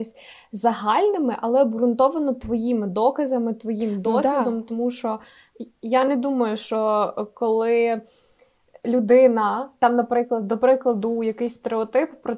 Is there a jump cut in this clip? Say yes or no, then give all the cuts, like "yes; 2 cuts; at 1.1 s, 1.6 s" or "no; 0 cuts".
no; 0 cuts